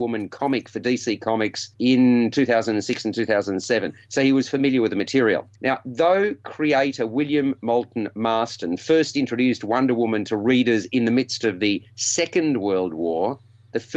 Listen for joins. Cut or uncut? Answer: cut